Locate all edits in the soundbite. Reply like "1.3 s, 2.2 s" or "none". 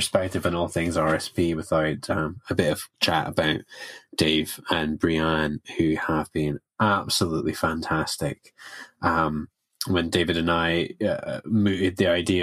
none